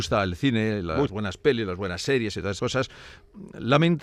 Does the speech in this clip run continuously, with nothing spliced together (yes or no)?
no